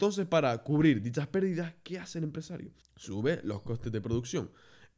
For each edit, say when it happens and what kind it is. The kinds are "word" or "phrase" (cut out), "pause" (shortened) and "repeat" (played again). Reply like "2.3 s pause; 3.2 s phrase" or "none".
2.8 s pause